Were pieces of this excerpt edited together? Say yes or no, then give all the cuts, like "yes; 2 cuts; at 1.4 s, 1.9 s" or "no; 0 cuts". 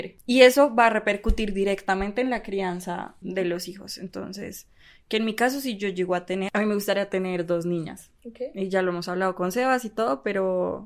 yes; 2 cuts; at 3.2 s, 8.2 s